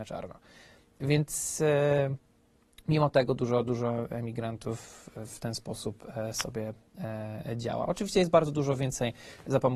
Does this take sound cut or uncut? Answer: uncut